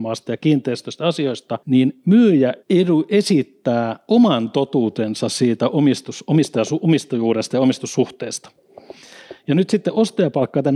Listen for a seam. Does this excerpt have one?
yes; 2 cuts; at 1.6 s, 2.6 s

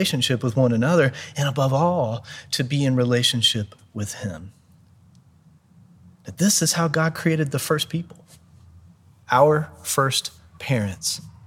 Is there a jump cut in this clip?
no; 0 cuts

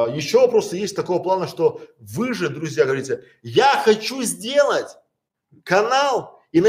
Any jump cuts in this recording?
no; 0 cuts

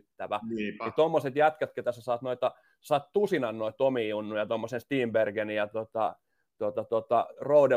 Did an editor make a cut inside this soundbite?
no; 0 cuts

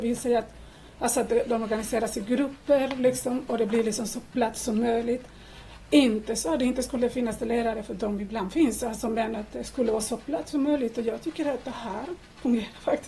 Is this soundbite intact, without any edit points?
yes; 0 cuts

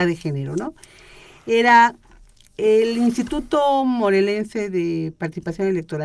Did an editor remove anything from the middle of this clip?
no; 0 cuts

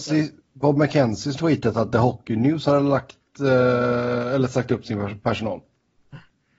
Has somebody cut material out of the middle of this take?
yes; 1 cut; at 1.4 s

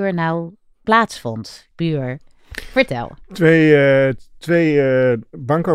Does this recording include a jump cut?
yes; 1 cut; at 1.7 s

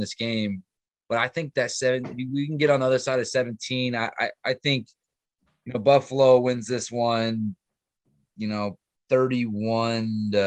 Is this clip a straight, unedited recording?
yes; 0 cuts

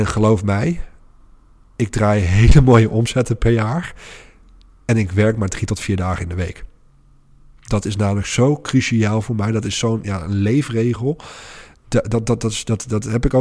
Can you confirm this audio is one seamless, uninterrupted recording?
yes; 0 cuts

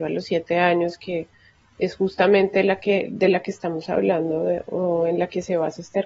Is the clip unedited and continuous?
yes; 0 cuts

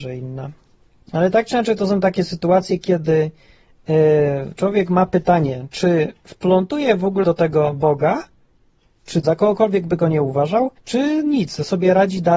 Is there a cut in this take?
yes; 3 cuts; at 7.2 s, 9.2 s, 10.8 s

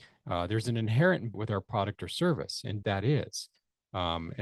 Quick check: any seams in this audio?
yes; 2 cuts; at 1.3 s, 2.8 s

